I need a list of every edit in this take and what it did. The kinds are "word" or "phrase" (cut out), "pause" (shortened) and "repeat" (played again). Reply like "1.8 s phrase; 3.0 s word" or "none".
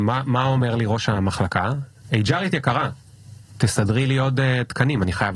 none